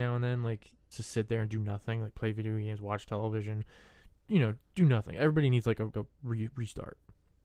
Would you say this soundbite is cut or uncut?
cut